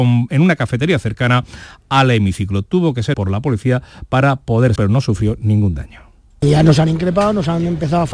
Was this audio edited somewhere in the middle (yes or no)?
yes